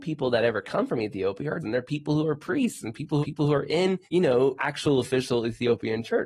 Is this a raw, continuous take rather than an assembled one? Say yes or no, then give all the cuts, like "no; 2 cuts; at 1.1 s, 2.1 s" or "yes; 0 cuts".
no; 4 cuts; at 1.6 s, 3.2 s, 4.0 s, 4.6 s